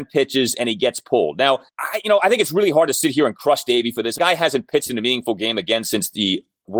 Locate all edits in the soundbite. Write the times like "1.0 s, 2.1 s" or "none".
1.7 s, 4.2 s